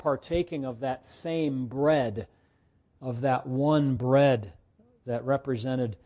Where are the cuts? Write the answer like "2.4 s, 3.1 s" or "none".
none